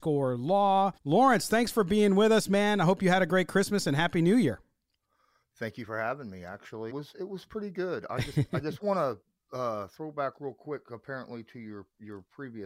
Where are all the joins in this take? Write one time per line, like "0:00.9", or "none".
0:01.0
0:06.9